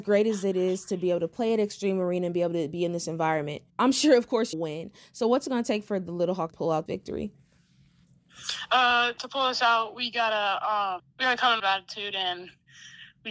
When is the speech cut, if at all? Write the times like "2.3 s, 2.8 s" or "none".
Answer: 3.7 s, 4.5 s, 6.5 s, 6.9 s, 9.2 s, 11.0 s, 11.6 s

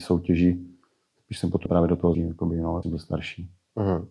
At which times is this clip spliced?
1.7 s, 2.1 s, 2.8 s

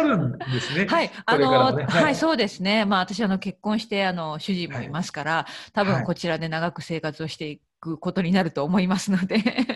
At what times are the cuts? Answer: none

